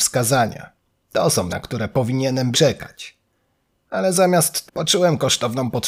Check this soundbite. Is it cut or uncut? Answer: cut